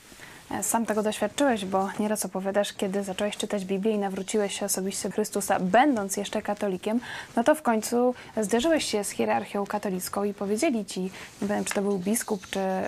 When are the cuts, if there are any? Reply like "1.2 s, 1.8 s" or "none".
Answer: 5.1 s